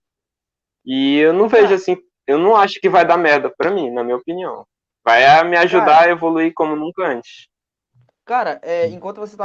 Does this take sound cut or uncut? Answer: uncut